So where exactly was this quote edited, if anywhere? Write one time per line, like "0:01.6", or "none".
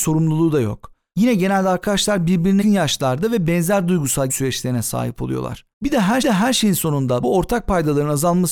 0:02.6
0:04.3
0:05.7
0:06.2
0:07.2